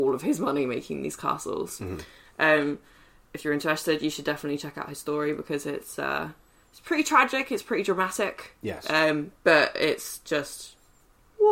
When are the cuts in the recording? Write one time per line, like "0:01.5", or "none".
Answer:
none